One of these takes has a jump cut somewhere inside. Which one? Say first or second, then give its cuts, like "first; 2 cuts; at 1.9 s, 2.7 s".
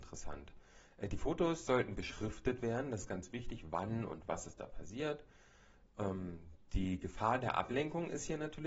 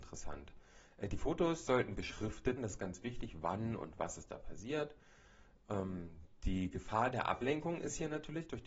second; 1 cut; at 2.6 s